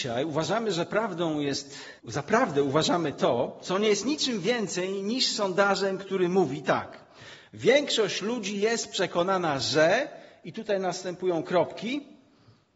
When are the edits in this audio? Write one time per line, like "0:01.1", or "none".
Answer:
0:02.0